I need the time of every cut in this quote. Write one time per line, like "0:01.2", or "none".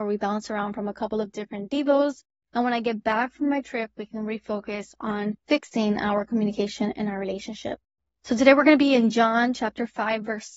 0:05.4